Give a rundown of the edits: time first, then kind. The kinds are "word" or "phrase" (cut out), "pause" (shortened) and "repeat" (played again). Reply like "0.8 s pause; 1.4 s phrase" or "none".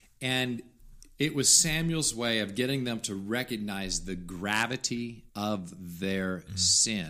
5.3 s pause